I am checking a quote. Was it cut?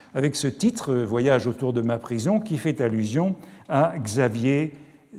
no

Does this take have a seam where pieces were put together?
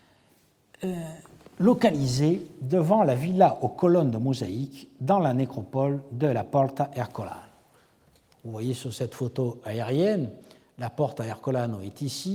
no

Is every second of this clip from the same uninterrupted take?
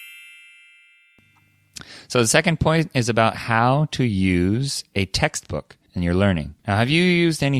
no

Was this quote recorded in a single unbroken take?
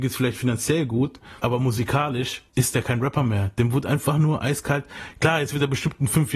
no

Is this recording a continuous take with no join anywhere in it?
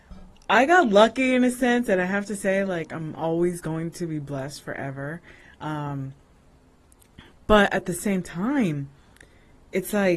yes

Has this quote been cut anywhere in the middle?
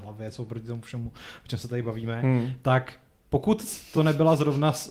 no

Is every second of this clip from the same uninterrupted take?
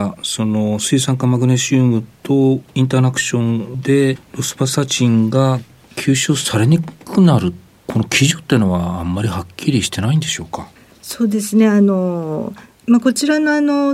yes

